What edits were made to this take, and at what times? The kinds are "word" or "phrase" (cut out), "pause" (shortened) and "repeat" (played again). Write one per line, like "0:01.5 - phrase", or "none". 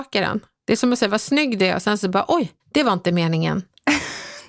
0:02.6 - pause